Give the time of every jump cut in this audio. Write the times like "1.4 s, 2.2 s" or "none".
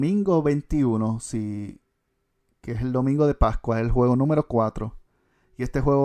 none